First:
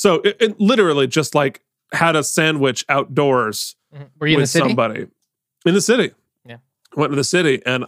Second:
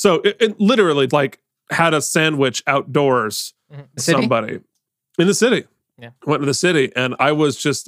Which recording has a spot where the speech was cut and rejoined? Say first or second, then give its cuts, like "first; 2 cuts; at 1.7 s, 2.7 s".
second; 3 cuts; at 1.1 s, 4.0 s, 6.2 s